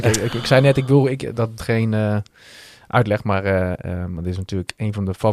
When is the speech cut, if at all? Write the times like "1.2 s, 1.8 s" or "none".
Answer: 1.6 s